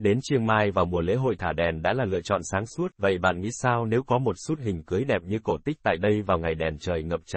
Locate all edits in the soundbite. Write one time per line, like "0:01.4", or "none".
0:02.9